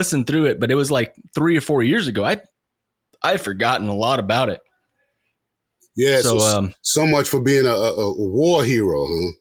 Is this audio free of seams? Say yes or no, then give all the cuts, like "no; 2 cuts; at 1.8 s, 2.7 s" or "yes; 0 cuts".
yes; 0 cuts